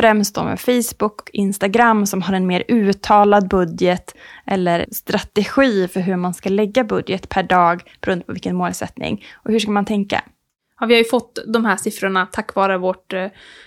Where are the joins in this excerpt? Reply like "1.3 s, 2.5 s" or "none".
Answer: 1.2 s, 4.8 s